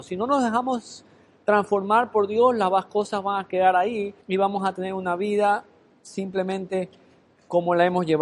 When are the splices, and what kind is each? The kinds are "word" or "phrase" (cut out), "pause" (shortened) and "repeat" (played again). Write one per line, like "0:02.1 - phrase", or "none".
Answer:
0:04.2 - pause

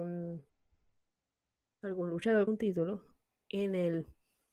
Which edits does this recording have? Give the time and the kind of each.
0:02.5 - word

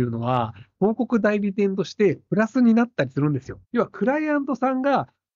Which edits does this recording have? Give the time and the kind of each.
0:03.6 - pause

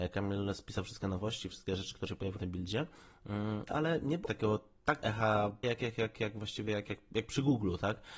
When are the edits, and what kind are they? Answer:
0:01.5 - word
0:02.1 - word
0:02.4 - word
0:03.7 - word
0:04.3 - word
0:05.0 - word
0:05.6 - word

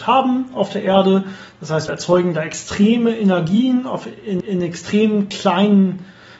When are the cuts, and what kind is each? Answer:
0:01.9 - word
0:04.4 - repeat

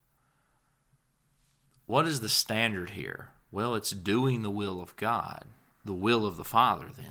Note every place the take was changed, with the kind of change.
0:05.7 - pause

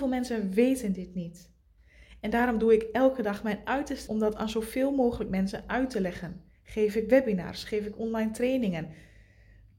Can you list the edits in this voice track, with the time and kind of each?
0:04.1 - word
0:06.5 - pause

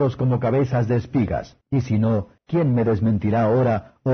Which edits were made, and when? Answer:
0:01.6 - pause
0:02.4 - pause

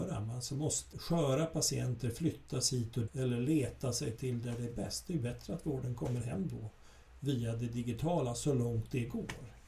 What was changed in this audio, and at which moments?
0:00.9 - word
0:03.1 - word

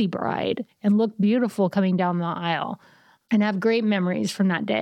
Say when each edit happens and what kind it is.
none

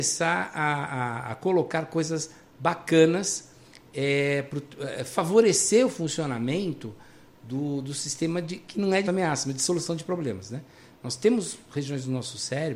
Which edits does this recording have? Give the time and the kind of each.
0:09.0 - phrase

